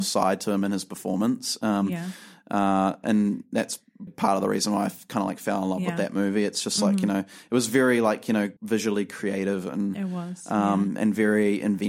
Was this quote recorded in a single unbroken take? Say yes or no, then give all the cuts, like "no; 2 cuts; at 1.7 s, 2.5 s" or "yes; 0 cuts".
no; 2 cuts; at 4.1 s, 8.6 s